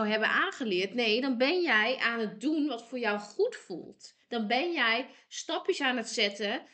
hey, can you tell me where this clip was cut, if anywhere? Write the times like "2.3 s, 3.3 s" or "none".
4.2 s